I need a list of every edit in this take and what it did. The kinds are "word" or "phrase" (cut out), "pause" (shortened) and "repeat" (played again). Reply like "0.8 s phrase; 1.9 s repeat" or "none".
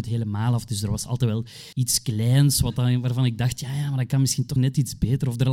1.7 s pause; 4.6 s word